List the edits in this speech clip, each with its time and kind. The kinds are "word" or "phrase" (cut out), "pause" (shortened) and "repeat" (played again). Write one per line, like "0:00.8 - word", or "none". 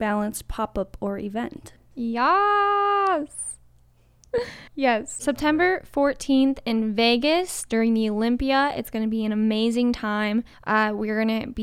0:04.7 - pause
0:10.5 - pause